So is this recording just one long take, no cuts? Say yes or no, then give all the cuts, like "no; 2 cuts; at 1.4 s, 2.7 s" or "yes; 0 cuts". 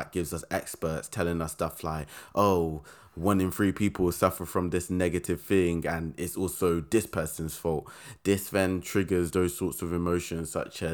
yes; 0 cuts